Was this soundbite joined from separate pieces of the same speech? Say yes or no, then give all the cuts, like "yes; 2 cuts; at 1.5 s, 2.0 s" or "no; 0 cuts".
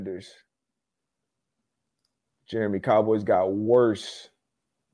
no; 0 cuts